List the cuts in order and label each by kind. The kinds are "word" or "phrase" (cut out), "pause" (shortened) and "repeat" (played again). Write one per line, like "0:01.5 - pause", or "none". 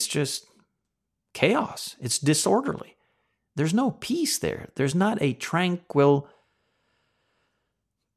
none